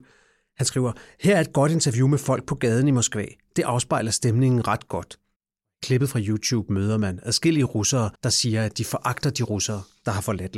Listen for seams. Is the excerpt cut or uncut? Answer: cut